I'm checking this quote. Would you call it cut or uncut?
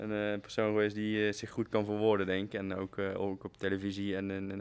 uncut